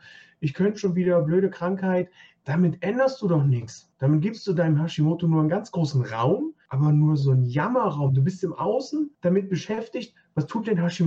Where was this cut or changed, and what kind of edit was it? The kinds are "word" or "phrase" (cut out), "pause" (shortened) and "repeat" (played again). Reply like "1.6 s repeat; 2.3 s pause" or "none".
none